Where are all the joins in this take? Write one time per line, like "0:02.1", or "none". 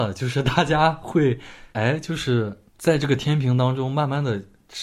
0:01.7
0:02.7